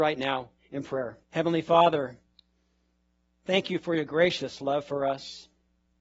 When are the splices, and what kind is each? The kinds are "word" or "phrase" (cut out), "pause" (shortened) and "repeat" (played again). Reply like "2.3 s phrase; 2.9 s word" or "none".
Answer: 1.2 s pause

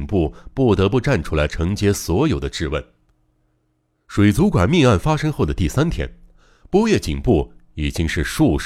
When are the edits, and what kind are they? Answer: none

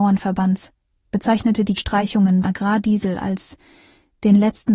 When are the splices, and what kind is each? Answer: 1.8 s word; 2.4 s word

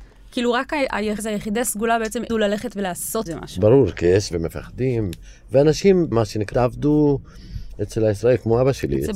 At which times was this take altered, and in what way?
1.2 s word; 2.3 s word; 3.3 s word; 4.3 s word; 6.1 s word; 6.5 s word

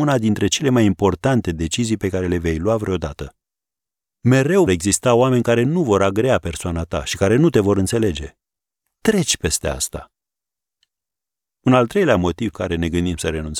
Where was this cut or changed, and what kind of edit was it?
4.7 s word; 12.5 s word

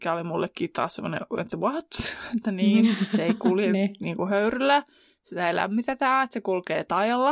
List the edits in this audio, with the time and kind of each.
none

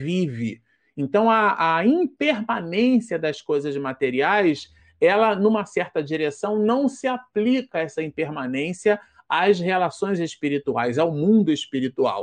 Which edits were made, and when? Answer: none

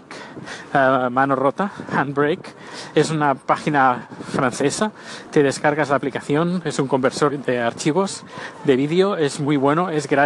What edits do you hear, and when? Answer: 7.3 s word

